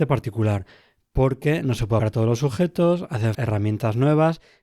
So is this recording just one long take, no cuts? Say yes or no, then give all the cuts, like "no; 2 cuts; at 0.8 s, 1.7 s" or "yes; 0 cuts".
no; 2 cuts; at 2.0 s, 3.3 s